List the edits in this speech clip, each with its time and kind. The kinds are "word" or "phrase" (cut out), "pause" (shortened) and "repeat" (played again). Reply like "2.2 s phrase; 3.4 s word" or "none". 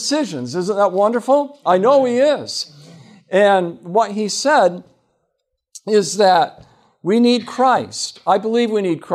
none